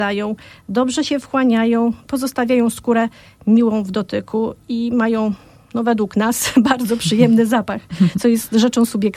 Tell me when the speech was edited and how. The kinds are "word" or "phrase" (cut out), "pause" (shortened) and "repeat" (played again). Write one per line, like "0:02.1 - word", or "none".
none